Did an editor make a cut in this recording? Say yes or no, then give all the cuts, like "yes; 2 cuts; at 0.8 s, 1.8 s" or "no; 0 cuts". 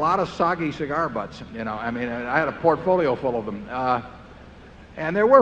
no; 0 cuts